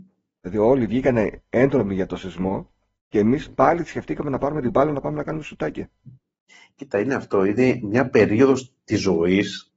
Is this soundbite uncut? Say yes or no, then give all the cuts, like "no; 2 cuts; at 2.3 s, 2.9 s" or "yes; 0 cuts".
yes; 0 cuts